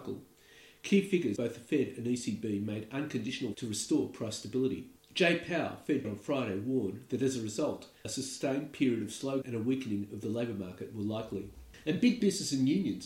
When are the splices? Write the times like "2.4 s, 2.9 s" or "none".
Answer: 1.4 s, 3.5 s, 6.0 s, 9.4 s